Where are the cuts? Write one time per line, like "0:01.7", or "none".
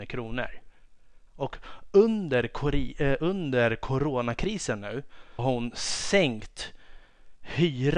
0:01.3
0:05.4